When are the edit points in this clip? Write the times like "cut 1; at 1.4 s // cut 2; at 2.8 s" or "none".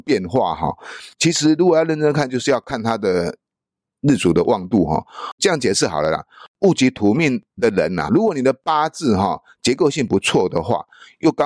cut 1; at 1.1 s // cut 2; at 7.5 s // cut 3; at 8.1 s